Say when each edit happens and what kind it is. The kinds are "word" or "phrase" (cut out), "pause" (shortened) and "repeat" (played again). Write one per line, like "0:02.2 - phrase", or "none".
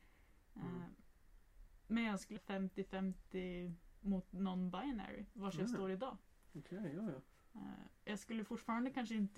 0:02.4 - phrase